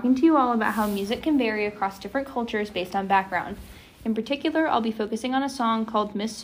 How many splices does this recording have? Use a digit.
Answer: 0